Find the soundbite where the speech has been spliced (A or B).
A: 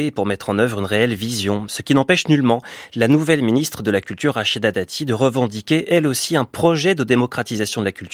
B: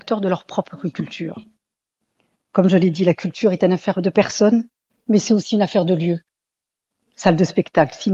B